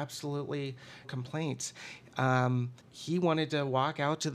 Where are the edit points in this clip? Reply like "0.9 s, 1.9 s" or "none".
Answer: 1.0 s, 2.8 s